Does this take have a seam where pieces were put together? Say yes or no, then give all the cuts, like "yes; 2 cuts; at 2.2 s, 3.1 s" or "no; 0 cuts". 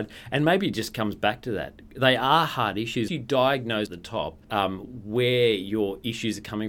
yes; 3 cuts; at 3.1 s, 3.9 s, 4.4 s